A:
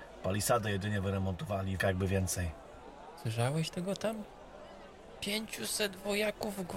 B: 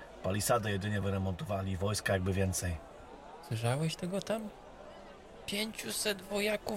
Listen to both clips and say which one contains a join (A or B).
A